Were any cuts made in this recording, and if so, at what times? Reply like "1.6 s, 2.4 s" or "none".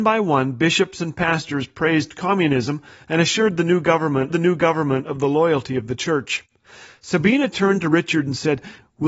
4.3 s